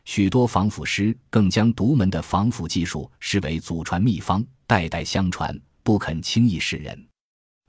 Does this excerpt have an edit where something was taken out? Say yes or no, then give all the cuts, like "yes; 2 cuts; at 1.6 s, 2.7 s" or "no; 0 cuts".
no; 0 cuts